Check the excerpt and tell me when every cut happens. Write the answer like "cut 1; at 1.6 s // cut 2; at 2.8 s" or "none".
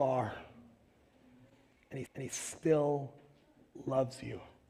cut 1; at 2.1 s